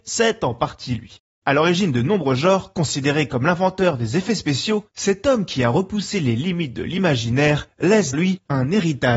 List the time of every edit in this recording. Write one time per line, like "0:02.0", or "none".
0:08.1